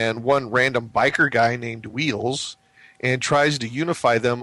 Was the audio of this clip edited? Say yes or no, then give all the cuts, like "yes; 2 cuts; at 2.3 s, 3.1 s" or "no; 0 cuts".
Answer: no; 0 cuts